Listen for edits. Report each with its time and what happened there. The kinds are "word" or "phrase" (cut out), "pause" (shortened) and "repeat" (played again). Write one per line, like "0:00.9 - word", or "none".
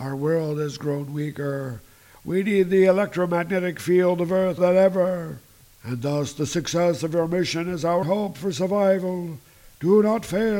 0:04.6 - word
0:08.0 - word